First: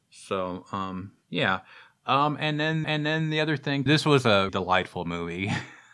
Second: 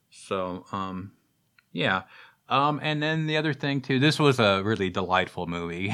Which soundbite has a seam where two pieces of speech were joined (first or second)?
first